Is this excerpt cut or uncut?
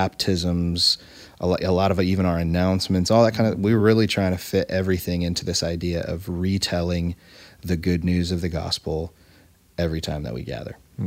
uncut